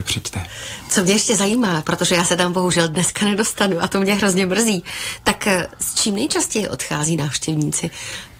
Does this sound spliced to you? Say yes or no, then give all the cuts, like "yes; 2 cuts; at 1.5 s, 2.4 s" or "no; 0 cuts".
no; 0 cuts